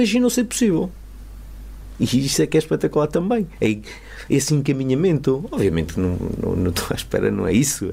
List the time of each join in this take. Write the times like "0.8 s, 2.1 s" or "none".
none

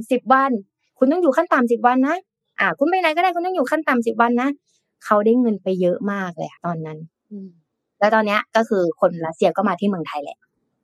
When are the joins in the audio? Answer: 6.6 s

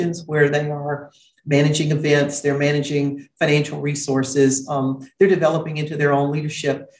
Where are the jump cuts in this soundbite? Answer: none

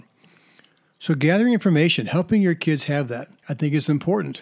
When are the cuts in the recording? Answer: 3.4 s

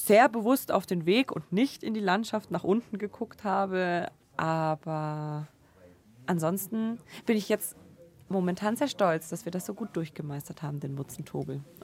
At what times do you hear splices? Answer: none

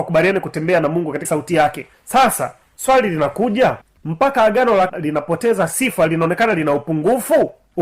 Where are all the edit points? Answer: 1.2 s, 4.0 s, 4.9 s

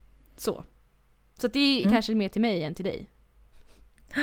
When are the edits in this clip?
1.8 s

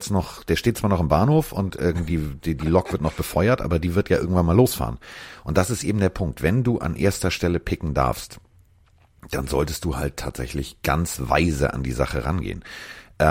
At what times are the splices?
none

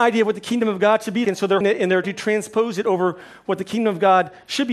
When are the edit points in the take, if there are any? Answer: 1.2 s, 1.6 s, 2.0 s

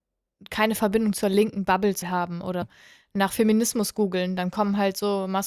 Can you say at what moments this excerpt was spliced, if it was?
2.0 s, 2.6 s

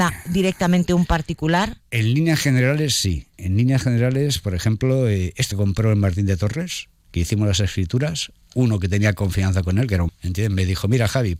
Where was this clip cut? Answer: 5.5 s, 10.1 s

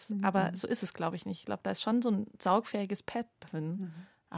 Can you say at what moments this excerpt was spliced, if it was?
none

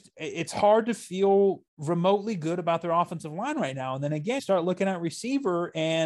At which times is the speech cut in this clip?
1.7 s, 4.4 s

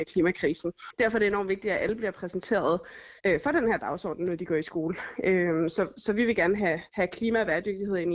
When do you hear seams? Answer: 3.2 s, 6.9 s

